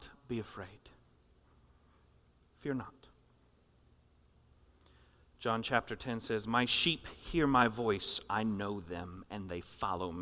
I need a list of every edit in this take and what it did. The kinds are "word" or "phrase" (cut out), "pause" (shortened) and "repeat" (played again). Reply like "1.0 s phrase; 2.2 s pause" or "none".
none